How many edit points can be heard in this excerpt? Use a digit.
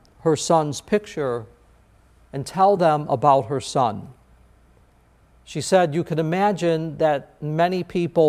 0